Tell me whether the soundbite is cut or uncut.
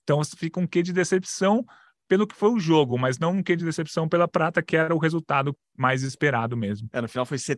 uncut